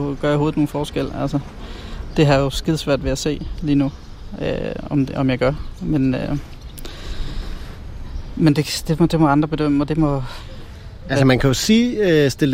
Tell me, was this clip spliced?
no; 0 cuts

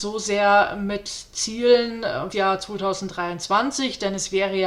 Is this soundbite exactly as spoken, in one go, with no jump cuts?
no; 1 cut; at 2.3 s

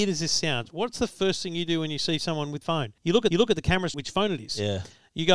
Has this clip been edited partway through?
yes; 4 cuts; at 2.6 s, 3.0 s, 3.3 s, 3.9 s

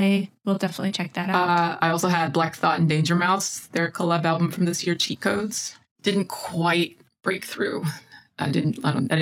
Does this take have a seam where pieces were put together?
no; 0 cuts

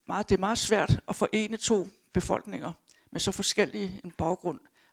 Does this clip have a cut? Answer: no; 0 cuts

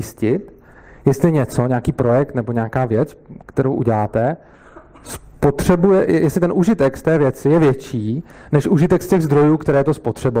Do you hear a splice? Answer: no; 0 cuts

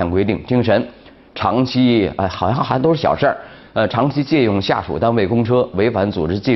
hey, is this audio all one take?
yes; 0 cuts

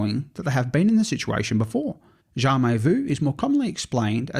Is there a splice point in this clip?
yes; 1 cut; at 2.2 s

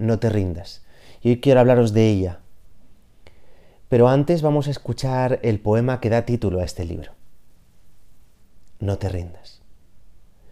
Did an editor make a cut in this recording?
no; 0 cuts

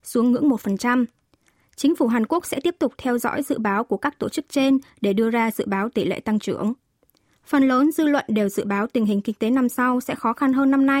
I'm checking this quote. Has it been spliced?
no; 0 cuts

